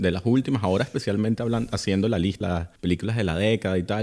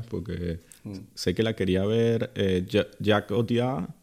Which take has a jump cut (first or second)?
first